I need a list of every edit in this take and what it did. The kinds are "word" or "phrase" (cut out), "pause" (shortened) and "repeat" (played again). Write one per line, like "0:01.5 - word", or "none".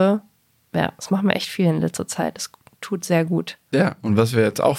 none

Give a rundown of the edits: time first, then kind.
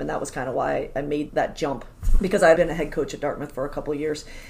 0:01.3 - word
0:02.2 - word
0:02.5 - word

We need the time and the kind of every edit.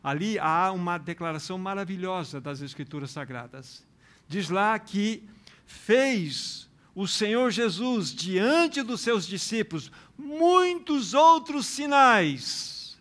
none

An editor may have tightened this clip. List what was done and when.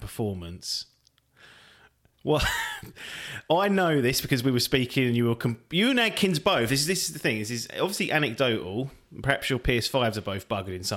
none

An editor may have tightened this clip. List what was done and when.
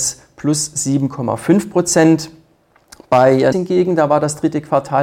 0:03.5 - word

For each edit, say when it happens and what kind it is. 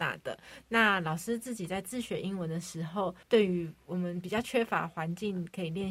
0:03.2 - pause

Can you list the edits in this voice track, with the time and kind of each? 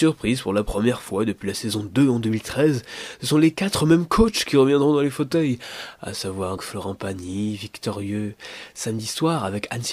0:06.6 - word

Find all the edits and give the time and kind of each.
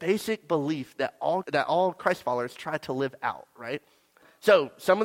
0:01.4 - word

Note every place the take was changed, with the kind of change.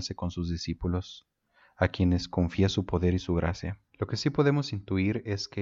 0:03.9 - pause

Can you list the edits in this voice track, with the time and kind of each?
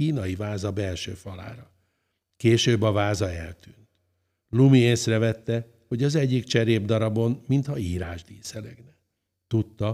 none

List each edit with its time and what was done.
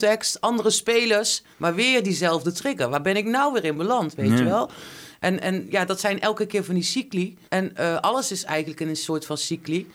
0:01.5 - pause
0:07.4 - pause

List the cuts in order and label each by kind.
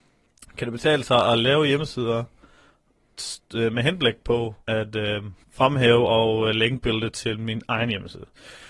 0:04.6 - pause
0:05.4 - pause

